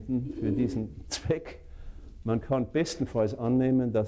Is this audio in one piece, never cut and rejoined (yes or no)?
yes